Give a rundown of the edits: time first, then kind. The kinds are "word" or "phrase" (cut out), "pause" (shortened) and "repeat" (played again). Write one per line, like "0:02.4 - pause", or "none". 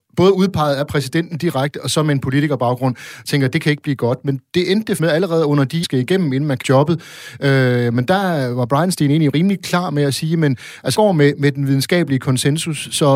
0:05.0 - word
0:05.8 - phrase
0:06.6 - word
0:10.9 - word